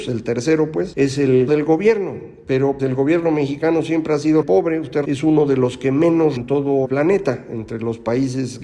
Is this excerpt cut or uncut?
cut